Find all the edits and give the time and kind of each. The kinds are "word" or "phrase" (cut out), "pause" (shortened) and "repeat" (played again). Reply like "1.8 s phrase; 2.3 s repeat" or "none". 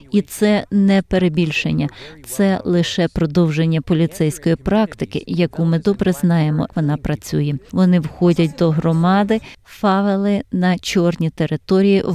6.7 s word